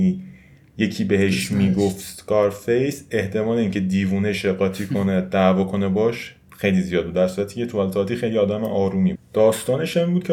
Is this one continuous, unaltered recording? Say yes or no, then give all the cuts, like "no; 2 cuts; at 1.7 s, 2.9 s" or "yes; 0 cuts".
no; 1 cut; at 9.1 s